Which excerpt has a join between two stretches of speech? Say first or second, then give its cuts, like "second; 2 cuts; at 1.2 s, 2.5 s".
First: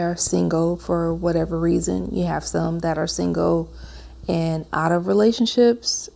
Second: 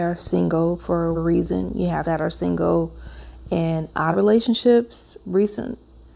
second; 3 cuts; at 1.1 s, 2.0 s, 4.1 s